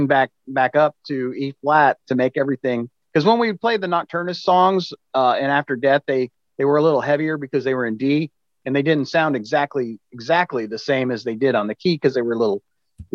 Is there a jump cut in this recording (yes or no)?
no